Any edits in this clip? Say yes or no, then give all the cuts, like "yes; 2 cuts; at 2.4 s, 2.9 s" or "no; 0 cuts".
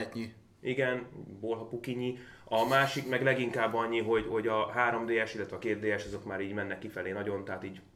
no; 0 cuts